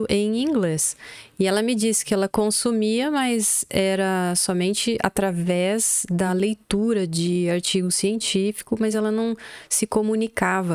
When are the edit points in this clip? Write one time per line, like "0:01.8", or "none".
none